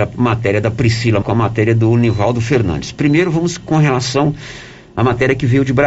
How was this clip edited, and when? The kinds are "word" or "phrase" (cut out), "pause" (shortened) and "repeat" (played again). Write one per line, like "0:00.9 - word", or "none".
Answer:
0:01.2 - word